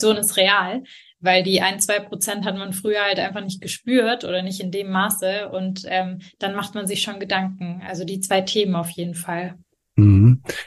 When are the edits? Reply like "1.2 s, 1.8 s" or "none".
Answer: none